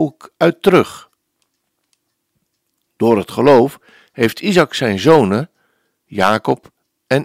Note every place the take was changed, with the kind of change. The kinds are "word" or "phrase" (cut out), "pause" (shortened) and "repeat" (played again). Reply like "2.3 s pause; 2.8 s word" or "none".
none